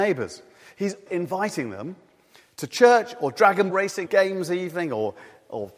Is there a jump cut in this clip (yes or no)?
yes